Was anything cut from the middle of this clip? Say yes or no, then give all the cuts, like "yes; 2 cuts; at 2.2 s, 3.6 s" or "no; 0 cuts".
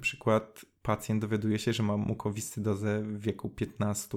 no; 0 cuts